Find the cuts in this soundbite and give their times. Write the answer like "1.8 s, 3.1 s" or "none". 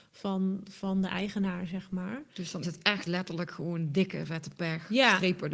2.6 s, 3.1 s